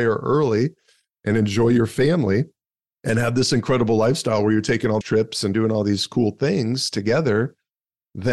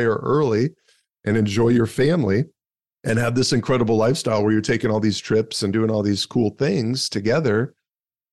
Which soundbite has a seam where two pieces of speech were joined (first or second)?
first